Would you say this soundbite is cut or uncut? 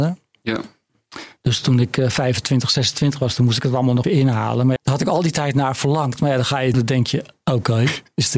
cut